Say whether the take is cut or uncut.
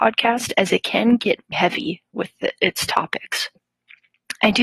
cut